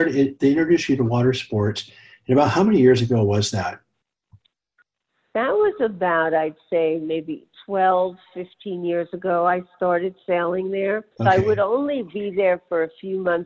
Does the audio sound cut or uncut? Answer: cut